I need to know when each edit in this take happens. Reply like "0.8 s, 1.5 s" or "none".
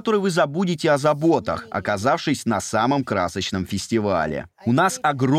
none